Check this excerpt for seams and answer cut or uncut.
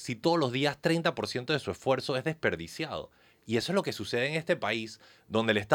uncut